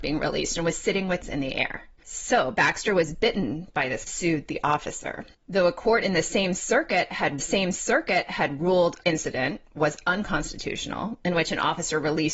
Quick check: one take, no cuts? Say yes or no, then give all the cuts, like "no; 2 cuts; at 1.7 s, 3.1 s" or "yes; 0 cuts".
no; 6 cuts; at 1.2 s, 2.0 s, 4.1 s, 5.3 s, 7.4 s, 9.0 s